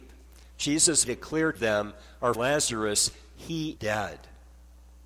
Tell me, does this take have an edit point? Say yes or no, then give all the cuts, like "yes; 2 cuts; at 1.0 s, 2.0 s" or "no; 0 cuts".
yes; 4 cuts; at 1.0 s, 1.5 s, 2.3 s, 3.8 s